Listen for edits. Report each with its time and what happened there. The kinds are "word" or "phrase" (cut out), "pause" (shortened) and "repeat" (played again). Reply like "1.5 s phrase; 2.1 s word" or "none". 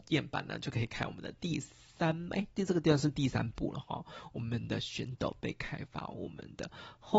none